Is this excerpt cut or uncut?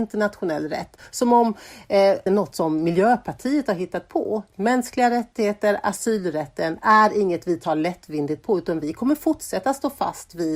cut